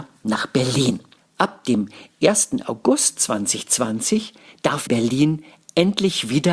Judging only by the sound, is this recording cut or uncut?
cut